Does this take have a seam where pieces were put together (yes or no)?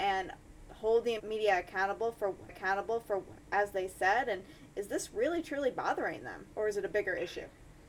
yes